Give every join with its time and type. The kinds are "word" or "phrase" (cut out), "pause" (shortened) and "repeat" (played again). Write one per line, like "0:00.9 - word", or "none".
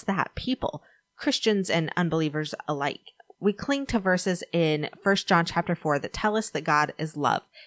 none